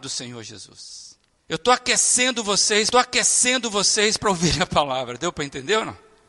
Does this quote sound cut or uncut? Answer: cut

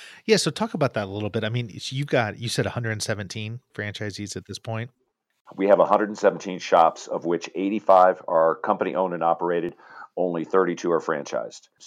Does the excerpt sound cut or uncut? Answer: uncut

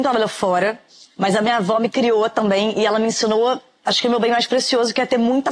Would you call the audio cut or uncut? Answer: uncut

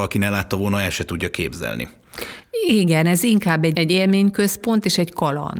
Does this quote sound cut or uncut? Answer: cut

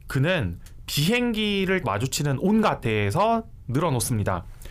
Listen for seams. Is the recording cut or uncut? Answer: cut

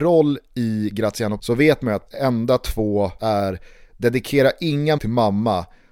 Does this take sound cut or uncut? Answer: cut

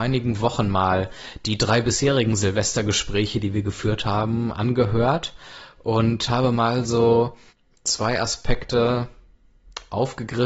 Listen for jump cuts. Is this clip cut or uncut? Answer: uncut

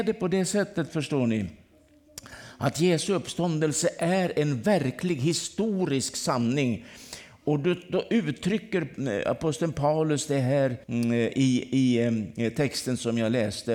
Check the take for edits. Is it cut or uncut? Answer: cut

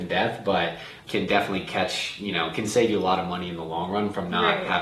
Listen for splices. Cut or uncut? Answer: cut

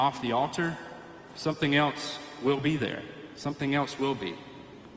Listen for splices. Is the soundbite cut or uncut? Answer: uncut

